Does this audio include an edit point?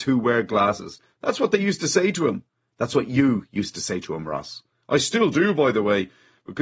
no; 0 cuts

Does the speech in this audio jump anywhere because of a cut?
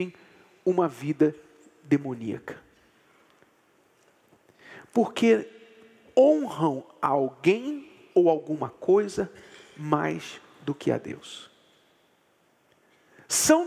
no; 0 cuts

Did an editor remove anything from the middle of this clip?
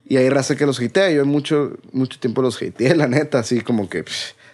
no; 0 cuts

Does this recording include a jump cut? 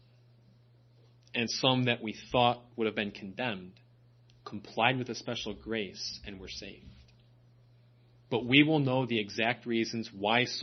no; 0 cuts

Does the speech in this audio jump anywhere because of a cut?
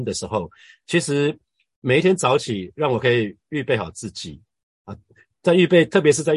no; 0 cuts

